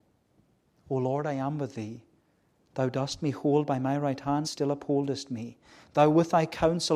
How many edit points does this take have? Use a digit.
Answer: 1